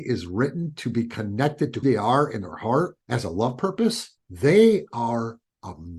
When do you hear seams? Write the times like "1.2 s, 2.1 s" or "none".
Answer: 1.8 s, 3.0 s, 4.2 s